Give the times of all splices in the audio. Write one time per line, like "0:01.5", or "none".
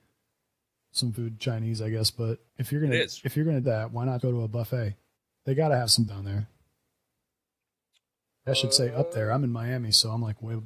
0:01.2
0:02.5
0:03.6
0:04.2
0:05.2
0:06.1
0:08.5